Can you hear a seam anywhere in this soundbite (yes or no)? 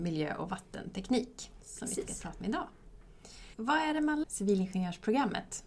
yes